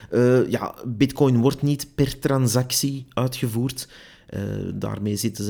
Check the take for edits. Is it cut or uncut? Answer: uncut